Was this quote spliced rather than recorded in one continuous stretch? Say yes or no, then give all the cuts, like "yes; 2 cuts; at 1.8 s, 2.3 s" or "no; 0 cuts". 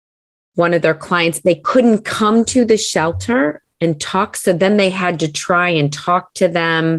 no; 0 cuts